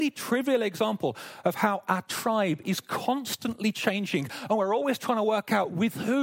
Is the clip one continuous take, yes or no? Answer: yes